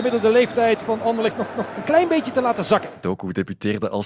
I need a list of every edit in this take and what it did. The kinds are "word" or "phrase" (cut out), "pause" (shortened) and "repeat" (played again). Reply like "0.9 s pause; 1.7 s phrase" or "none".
1.5 s repeat